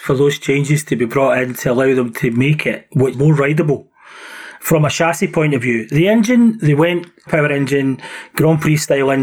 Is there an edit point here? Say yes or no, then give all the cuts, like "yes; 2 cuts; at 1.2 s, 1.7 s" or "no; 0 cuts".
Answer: yes; 2 cuts; at 3.1 s, 7.3 s